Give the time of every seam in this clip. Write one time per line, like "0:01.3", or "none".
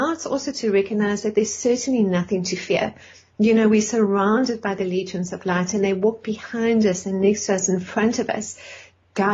none